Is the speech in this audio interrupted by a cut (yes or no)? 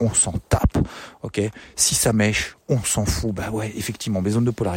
no